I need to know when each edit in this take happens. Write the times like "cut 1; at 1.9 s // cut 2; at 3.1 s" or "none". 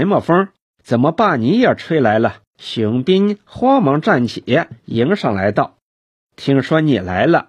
cut 1; at 2.5 s